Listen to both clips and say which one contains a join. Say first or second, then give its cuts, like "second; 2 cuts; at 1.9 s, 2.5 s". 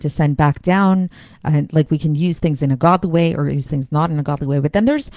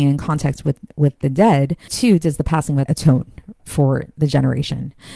second; 3 cuts; at 1.9 s, 2.9 s, 3.6 s